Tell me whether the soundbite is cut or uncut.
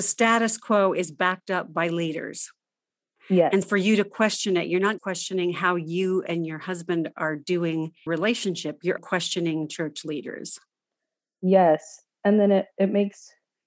cut